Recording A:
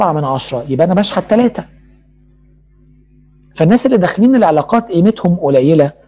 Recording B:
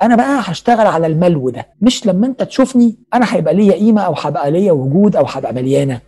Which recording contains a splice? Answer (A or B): B